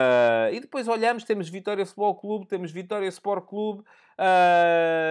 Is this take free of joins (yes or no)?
yes